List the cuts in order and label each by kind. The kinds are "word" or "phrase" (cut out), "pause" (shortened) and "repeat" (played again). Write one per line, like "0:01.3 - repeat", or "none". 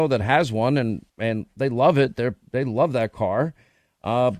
0:01.1 - pause